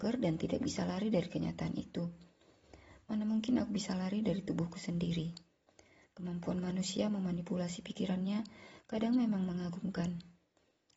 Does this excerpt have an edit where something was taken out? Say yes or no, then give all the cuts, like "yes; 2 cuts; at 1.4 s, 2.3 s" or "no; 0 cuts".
no; 0 cuts